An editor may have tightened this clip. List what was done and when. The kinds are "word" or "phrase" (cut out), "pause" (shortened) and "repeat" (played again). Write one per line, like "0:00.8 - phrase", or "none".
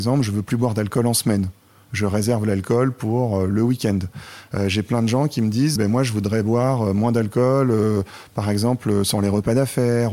0:05.8 - word